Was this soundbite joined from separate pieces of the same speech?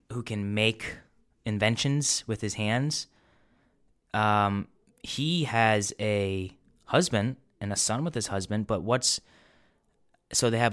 no; 0 cuts

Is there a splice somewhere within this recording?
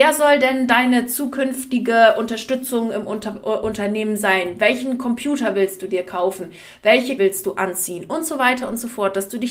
yes; 1 cut; at 7.2 s

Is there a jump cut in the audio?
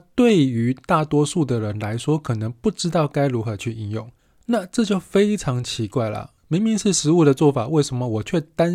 yes; 2 cuts; at 4.2 s, 6.4 s

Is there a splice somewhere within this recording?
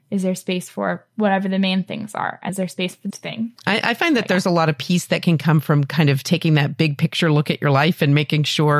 yes; 3 cuts; at 2.5 s, 3.1 s, 3.6 s

